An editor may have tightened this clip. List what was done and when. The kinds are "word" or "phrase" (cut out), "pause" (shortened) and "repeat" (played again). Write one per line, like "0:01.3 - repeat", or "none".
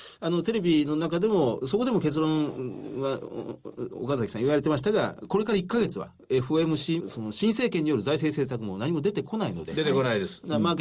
0:07.0 - word

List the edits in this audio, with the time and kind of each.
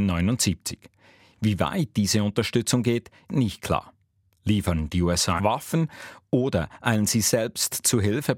0:03.3 - word
0:05.4 - word

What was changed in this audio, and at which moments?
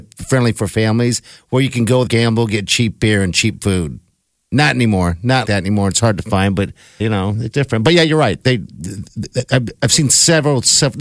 0:02.1 - word
0:05.4 - word
0:07.0 - word
0:07.5 - word

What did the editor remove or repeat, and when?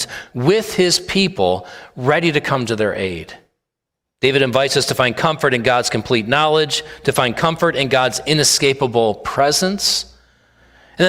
0:03.8 - pause

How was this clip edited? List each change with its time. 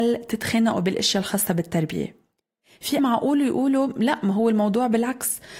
0:03.0 - word

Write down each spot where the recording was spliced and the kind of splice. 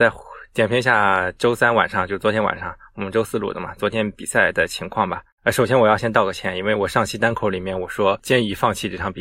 0:05.3 - pause

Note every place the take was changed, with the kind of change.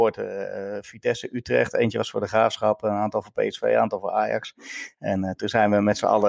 none

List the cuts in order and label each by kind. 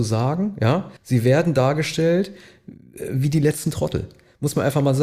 0:01.0 - pause

